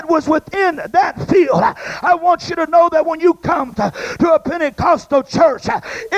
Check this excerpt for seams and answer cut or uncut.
cut